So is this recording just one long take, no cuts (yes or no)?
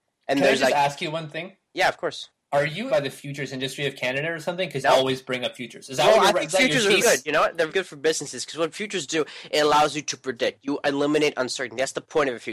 no